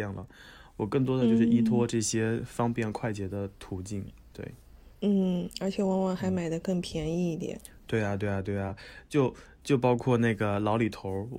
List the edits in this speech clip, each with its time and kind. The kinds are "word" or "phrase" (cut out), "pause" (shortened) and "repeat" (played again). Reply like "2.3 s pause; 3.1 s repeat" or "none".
none